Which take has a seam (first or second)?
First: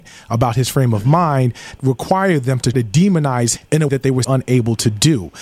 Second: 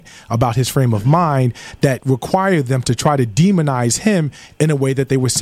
first